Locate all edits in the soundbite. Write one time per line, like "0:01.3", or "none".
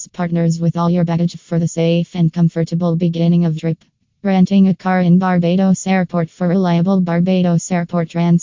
0:03.6